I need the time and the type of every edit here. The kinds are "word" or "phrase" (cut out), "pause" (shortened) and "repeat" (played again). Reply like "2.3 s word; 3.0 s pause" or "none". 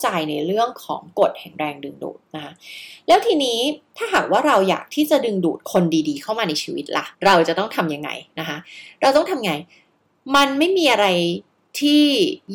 7.1 s pause